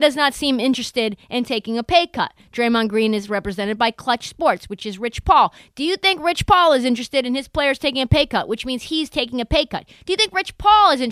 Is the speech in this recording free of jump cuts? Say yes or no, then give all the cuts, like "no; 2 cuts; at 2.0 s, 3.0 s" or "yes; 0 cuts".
yes; 0 cuts